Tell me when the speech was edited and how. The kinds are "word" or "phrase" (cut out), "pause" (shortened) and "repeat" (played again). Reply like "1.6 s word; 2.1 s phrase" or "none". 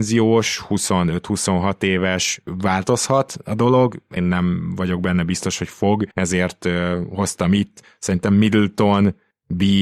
4.2 s word; 6.1 s pause